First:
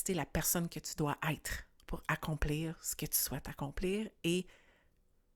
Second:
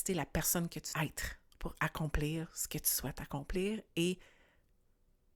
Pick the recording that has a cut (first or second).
second